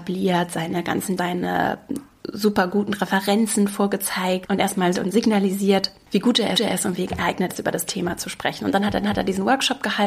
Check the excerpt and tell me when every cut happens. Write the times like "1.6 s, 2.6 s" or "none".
1.2 s, 4.9 s, 6.5 s, 7.5 s, 9.0 s